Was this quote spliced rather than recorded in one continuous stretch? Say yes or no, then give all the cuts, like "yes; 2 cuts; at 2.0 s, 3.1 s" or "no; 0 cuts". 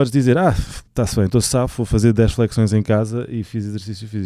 no; 0 cuts